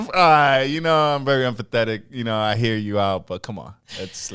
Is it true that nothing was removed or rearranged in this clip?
yes; 0 cuts

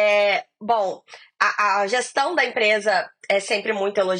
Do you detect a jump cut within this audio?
no; 0 cuts

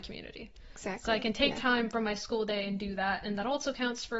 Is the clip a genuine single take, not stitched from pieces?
yes; 0 cuts

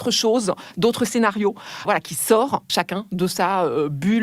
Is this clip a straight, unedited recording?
no; 2 cuts; at 1.8 s, 2.7 s

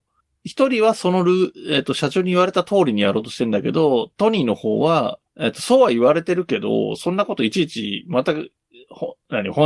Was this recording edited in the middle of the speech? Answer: yes; 1 cut; at 5.3 s

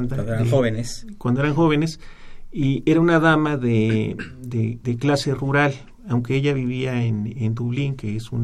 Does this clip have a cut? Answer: no; 0 cuts

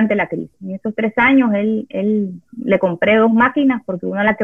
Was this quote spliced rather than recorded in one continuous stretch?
no; 0 cuts

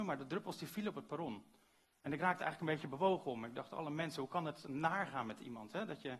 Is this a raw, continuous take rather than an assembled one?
yes; 0 cuts

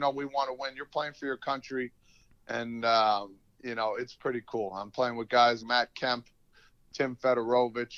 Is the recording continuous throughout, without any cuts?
no; 2 cuts; at 5.6 s, 6.8 s

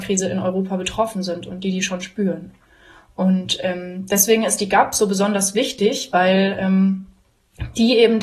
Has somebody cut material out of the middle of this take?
no; 0 cuts

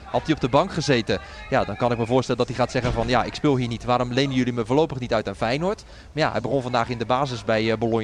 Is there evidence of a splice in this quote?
no; 0 cuts

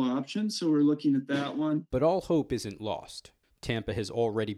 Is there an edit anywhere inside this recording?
no; 0 cuts

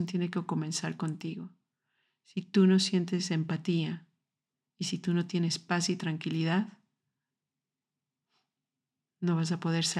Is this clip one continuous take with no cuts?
yes; 0 cuts

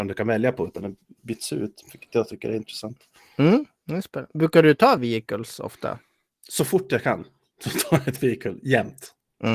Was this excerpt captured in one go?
yes; 0 cuts

